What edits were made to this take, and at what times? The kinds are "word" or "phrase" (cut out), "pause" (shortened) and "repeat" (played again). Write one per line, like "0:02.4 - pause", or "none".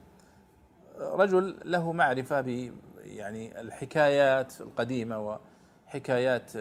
none